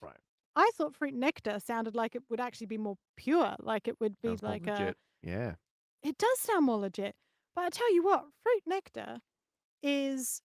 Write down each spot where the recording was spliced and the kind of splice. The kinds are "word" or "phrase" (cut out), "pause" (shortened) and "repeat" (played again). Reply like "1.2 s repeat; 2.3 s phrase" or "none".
none